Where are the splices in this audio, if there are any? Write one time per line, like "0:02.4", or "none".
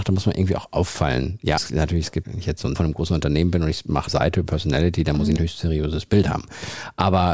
0:01.6
0:02.2
0:02.7
0:04.1
0:04.5
0:05.4